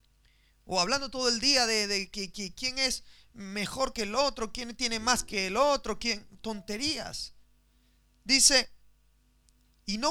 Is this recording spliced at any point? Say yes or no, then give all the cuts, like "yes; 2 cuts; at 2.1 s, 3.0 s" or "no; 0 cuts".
no; 0 cuts